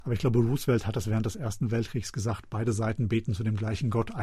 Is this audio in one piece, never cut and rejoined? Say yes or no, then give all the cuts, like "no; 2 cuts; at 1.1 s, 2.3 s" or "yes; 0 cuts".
yes; 0 cuts